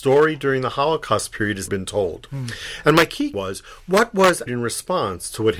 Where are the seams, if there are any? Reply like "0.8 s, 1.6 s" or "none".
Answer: 1.7 s, 3.3 s, 4.5 s